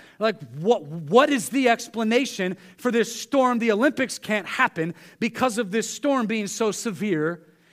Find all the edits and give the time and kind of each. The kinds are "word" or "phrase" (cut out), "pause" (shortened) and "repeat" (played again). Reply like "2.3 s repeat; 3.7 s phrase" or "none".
none